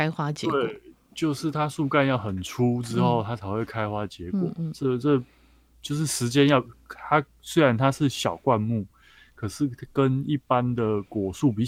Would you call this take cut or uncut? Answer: uncut